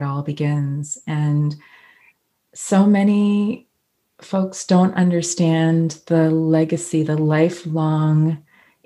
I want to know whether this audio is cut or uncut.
uncut